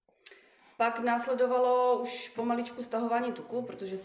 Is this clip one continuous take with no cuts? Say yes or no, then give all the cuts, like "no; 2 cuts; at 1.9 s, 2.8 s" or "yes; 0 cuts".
yes; 0 cuts